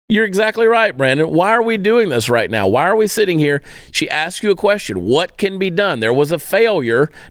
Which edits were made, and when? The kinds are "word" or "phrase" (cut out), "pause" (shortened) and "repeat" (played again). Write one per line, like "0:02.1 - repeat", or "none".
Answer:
none